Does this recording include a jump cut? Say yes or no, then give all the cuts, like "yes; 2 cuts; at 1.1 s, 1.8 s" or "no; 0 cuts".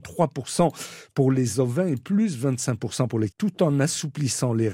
yes; 1 cut; at 3.3 s